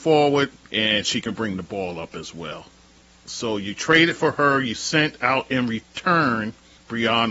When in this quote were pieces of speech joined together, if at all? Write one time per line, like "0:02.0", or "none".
none

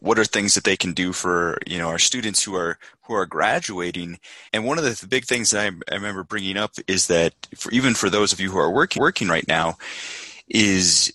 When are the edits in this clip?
0:04.5
0:09.0

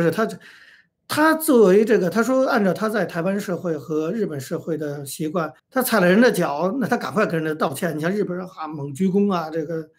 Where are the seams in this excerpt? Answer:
0:05.6

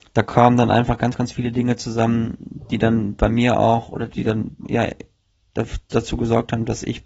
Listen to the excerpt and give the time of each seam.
none

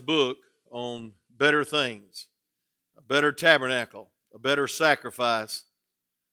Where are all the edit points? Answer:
none

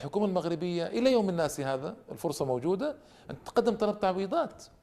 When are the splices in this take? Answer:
none

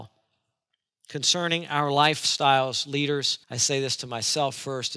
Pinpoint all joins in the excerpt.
0:03.4

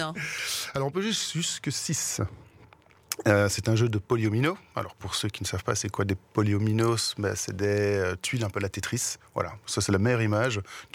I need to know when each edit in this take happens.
0:04.1

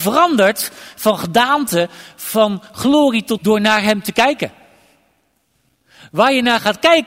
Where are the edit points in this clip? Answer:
0:03.4

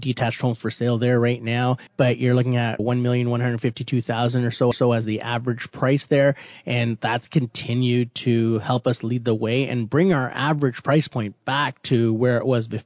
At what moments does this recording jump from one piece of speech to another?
0:01.9
0:02.8
0:04.7

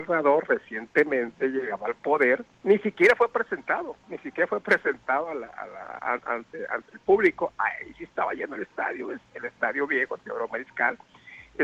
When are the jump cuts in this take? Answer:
0:02.5

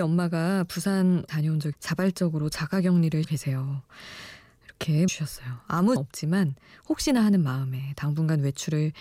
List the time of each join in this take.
0:01.3
0:01.7
0:03.2
0:05.1
0:06.0

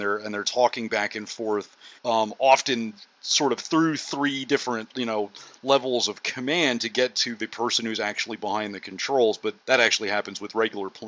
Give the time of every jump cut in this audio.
0:02.0
0:09.6

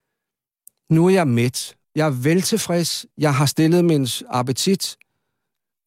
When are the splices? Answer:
0:01.8
0:03.1

